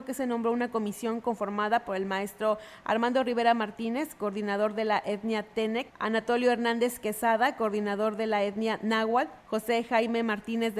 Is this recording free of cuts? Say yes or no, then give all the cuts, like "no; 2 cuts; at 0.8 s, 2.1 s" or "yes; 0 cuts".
no; 2 cuts; at 5.9 s, 9.4 s